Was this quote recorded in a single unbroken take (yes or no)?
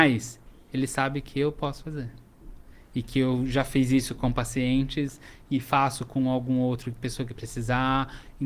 yes